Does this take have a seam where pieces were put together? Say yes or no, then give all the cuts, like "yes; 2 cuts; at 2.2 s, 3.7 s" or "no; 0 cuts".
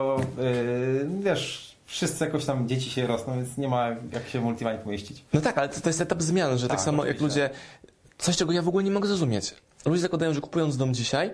no; 0 cuts